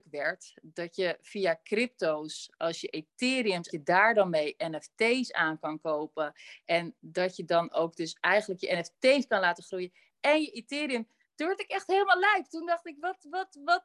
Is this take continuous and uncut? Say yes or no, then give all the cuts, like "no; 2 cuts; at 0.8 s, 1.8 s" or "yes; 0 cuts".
no; 1 cut; at 3.7 s